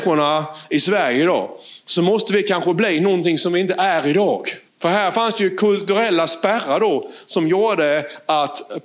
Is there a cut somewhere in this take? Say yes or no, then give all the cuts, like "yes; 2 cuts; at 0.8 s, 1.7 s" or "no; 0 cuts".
yes; 1 cut; at 4.7 s